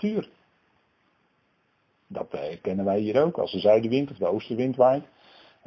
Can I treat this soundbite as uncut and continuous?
yes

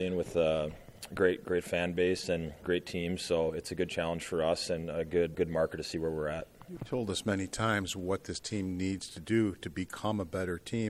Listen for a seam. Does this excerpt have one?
yes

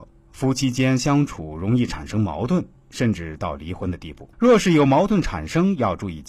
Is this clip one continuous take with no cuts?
no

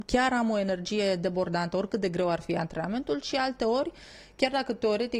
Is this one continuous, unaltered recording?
yes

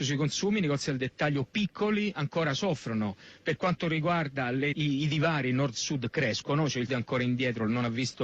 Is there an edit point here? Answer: yes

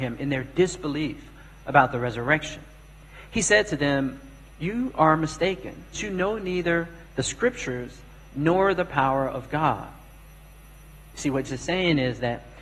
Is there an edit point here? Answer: yes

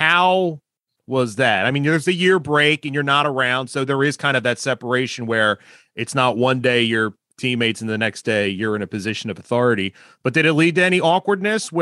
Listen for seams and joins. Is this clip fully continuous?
no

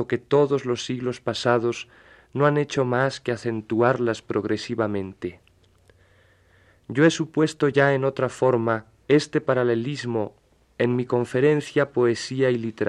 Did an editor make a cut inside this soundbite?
no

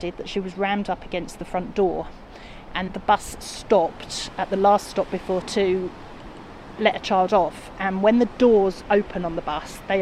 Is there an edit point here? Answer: yes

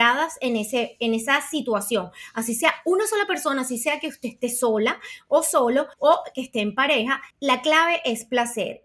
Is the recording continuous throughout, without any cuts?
no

